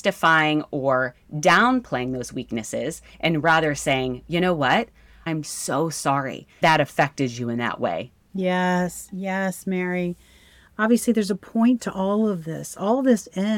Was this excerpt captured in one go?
yes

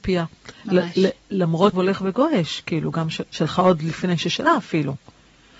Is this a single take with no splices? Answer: no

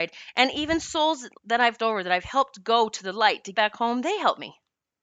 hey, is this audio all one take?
no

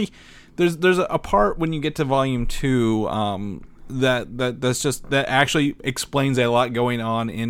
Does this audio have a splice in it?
no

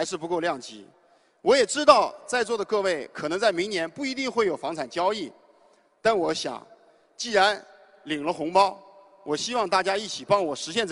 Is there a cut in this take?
no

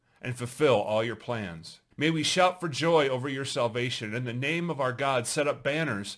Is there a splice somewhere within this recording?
yes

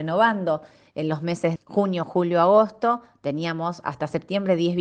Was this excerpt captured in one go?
no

